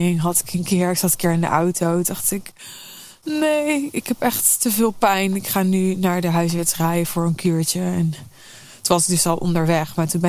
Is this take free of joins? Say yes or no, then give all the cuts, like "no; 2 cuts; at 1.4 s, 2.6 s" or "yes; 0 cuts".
yes; 0 cuts